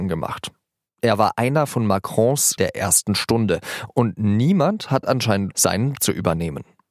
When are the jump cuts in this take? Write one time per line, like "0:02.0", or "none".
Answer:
0:02.6
0:05.5
0:05.9